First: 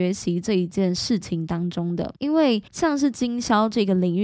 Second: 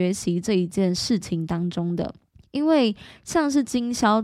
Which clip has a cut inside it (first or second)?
first